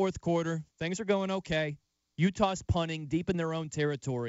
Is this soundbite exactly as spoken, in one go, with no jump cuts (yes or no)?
yes